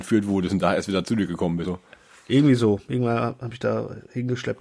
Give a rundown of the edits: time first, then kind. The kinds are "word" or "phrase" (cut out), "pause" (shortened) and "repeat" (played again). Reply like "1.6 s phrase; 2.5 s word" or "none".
1.6 s word